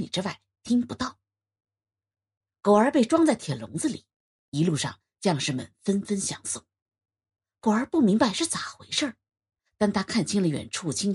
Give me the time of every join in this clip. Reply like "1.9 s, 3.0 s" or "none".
none